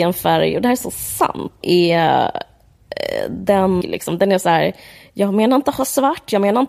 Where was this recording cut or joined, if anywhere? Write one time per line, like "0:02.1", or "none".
0:01.6
0:03.8

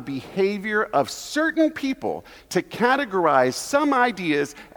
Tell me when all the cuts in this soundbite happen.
none

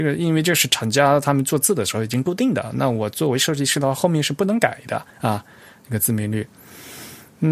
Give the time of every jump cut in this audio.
0:05.1

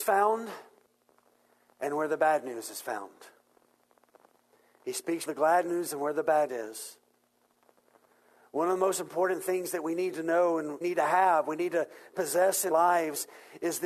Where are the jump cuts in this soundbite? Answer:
0:05.3
0:05.9
0:06.5
0:10.8
0:12.7

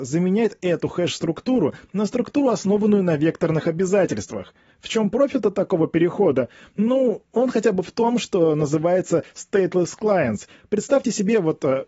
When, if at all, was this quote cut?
none

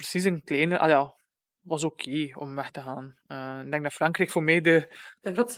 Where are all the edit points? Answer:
none

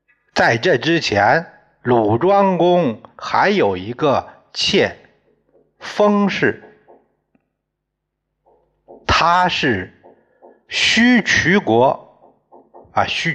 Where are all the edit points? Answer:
none

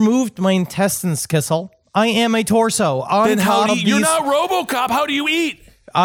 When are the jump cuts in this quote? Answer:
0:03.7

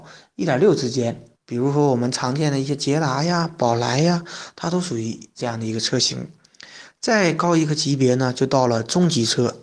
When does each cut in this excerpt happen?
0:01.3

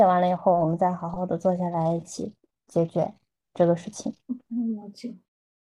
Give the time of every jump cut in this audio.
0:04.2

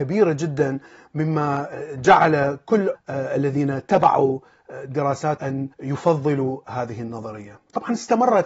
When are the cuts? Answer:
0:02.9
0:05.4
0:05.7

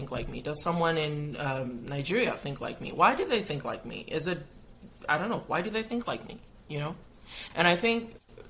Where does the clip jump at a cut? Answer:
none

